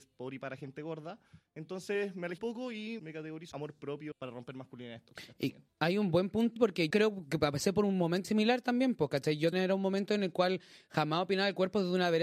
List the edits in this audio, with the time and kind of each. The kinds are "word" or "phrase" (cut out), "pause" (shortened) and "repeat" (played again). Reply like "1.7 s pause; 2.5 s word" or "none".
2.4 s word; 3.0 s word; 3.5 s word; 4.1 s word; 5.7 s word; 6.6 s word; 6.9 s word; 8.2 s word; 9.5 s word